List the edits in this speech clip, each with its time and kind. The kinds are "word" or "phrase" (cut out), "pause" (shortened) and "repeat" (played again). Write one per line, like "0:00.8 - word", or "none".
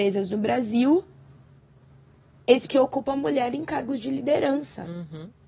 0:02.7 - phrase